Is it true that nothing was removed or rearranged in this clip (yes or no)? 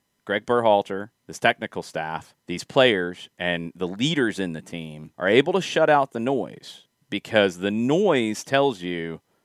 no